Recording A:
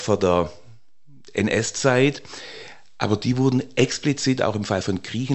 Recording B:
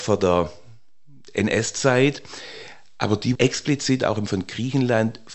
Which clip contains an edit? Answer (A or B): B